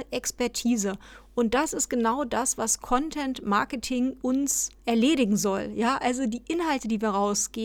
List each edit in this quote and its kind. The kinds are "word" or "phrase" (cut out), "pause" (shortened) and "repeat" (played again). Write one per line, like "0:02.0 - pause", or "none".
0:04.2 - word
0:04.8 - pause